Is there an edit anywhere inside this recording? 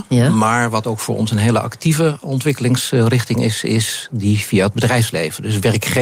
no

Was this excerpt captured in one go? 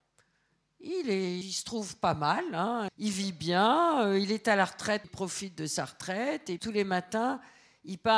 no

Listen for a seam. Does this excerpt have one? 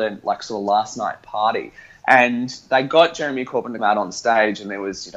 yes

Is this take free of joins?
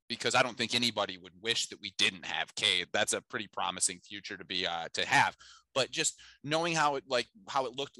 yes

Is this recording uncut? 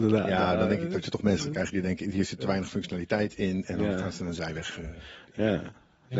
yes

